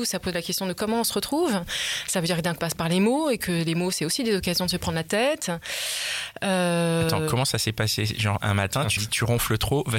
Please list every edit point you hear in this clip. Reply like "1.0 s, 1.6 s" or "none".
2.6 s, 8.4 s, 9.0 s